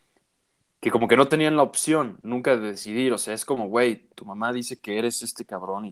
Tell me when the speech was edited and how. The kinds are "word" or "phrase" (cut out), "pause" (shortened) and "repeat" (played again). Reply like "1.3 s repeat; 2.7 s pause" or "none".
none